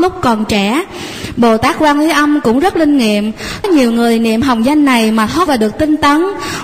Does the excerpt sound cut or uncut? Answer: cut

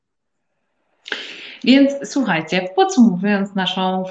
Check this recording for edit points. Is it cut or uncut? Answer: uncut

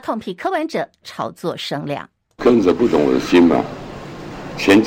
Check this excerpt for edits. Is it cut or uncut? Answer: uncut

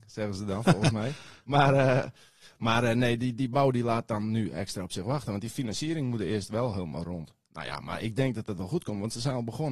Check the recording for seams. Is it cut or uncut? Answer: uncut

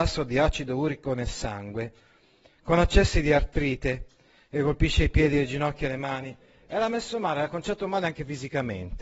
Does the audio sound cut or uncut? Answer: uncut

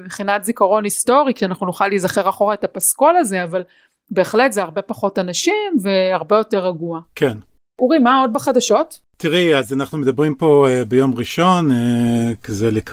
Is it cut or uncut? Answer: uncut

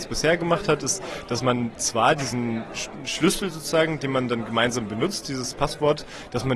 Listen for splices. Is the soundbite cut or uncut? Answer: uncut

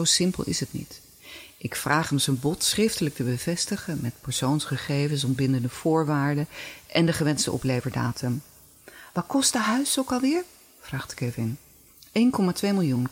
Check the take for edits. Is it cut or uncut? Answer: uncut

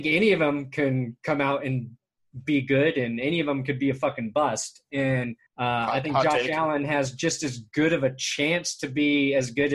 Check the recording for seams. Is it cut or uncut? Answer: cut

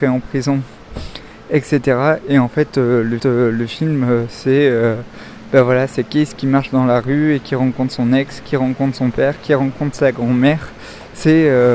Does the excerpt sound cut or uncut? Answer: cut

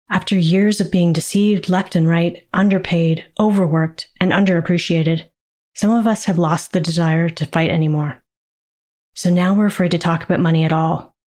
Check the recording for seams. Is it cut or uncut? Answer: uncut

